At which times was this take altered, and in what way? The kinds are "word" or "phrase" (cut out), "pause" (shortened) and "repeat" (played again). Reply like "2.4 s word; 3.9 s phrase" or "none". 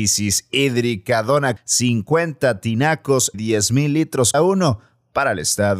1.6 s word; 3.3 s word; 4.3 s word